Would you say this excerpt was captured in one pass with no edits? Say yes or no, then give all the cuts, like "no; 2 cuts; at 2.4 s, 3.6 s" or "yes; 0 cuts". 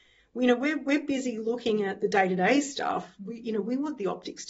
yes; 0 cuts